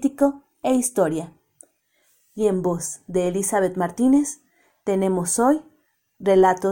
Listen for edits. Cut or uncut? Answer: uncut